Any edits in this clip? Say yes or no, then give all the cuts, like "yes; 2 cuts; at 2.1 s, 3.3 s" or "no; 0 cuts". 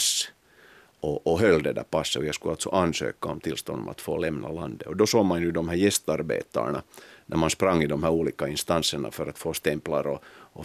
no; 0 cuts